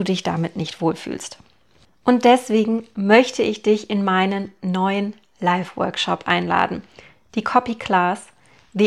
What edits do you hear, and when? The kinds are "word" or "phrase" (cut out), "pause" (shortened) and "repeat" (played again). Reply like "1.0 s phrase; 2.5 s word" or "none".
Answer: none